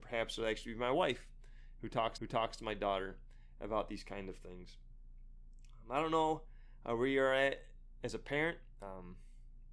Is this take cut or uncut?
cut